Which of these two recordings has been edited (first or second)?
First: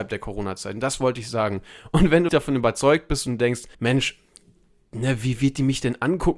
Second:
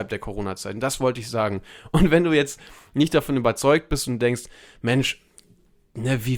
first